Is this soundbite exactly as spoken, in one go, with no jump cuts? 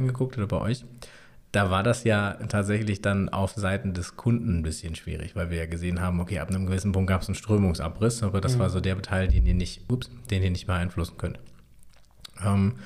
yes; 0 cuts

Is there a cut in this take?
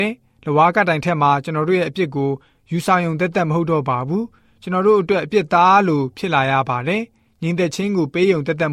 no; 0 cuts

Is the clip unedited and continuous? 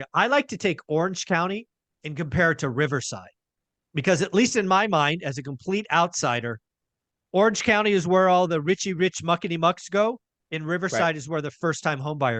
yes; 0 cuts

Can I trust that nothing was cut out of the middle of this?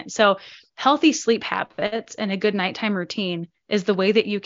yes; 0 cuts

